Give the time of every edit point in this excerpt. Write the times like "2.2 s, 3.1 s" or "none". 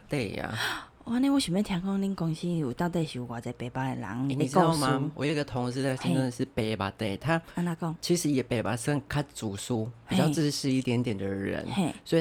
none